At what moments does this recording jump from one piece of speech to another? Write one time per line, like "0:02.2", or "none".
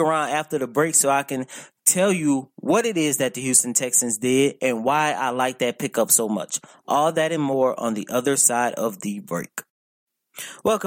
none